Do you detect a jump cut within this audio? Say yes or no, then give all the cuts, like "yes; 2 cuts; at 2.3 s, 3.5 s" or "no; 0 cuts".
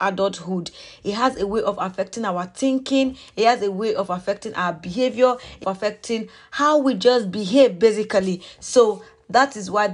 yes; 1 cut; at 5.6 s